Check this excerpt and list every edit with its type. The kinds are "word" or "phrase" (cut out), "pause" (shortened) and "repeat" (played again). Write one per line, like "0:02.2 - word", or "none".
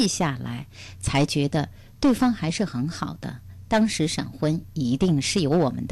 none